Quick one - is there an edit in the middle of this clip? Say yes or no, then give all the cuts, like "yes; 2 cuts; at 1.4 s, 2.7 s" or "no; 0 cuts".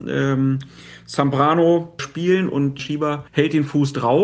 yes; 3 cuts; at 2.0 s, 2.8 s, 3.3 s